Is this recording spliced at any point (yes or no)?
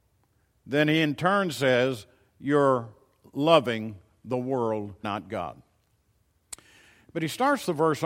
yes